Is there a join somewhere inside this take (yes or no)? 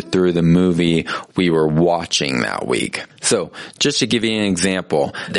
no